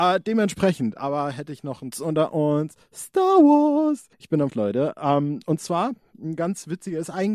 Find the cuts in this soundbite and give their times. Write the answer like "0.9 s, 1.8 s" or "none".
1.9 s, 4.1 s, 4.5 s